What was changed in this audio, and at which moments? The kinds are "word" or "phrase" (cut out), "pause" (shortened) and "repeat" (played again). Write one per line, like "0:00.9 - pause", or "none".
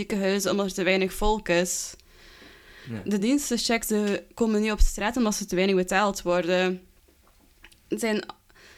none